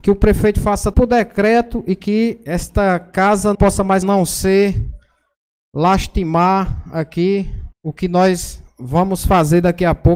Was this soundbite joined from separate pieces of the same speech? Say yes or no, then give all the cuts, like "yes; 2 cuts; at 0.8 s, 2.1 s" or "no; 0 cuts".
yes; 4 cuts; at 0.9 s, 3.5 s, 4.0 s, 7.7 s